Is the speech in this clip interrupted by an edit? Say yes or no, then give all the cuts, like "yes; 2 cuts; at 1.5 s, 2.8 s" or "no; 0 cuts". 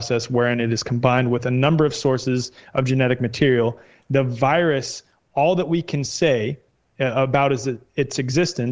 no; 0 cuts